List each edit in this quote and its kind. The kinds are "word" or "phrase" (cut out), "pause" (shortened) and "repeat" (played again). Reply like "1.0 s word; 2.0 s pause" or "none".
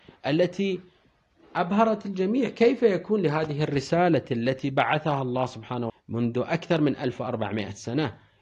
5.9 s word